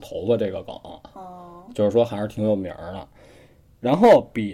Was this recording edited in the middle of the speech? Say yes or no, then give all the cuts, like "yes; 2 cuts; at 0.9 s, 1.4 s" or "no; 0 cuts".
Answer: no; 0 cuts